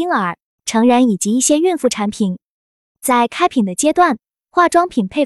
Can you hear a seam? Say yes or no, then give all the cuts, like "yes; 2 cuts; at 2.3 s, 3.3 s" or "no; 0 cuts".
no; 0 cuts